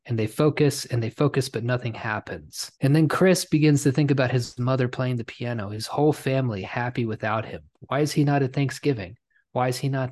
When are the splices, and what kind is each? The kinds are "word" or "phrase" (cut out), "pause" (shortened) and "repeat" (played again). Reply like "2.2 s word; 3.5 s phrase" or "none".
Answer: 2.8 s pause